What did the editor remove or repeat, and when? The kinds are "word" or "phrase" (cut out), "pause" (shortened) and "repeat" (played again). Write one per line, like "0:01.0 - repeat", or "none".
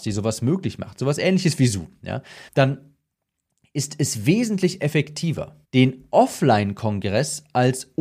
0:02.5 - pause
0:05.6 - pause